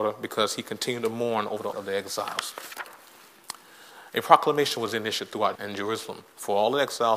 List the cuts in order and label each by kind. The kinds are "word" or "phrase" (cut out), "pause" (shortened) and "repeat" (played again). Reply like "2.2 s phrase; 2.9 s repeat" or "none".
1.7 s word; 5.6 s word